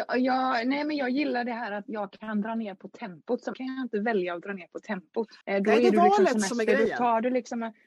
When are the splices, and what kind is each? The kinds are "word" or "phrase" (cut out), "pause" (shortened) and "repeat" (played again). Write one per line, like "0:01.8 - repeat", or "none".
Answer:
0:03.5 - word
0:05.4 - pause